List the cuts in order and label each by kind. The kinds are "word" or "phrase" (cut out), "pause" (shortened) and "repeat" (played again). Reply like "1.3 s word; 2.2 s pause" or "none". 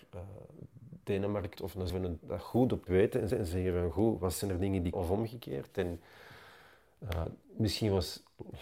1.6 s word; 1.9 s word; 2.2 s word; 2.9 s word; 3.3 s repeat; 4.9 s phrase; 7.4 s pause